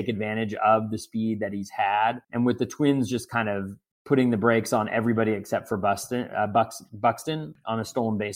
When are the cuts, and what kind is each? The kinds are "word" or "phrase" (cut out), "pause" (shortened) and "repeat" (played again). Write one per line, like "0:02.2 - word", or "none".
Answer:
0:02.2 - pause
0:03.9 - pause